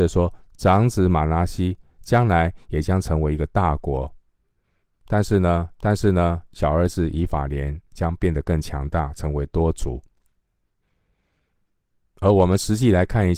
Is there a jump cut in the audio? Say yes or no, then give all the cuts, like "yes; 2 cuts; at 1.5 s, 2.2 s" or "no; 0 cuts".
yes; 1 cut; at 5.8 s